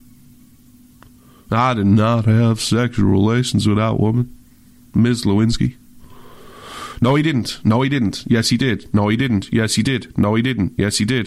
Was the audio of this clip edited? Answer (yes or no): no